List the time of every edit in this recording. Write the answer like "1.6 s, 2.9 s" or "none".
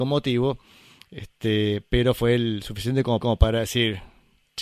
3.2 s